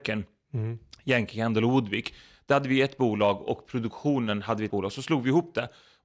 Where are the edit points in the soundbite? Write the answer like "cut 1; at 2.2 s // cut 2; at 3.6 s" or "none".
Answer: cut 1; at 4.7 s